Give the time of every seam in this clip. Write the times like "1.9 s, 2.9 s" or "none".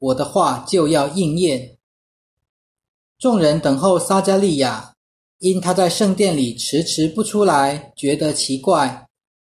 none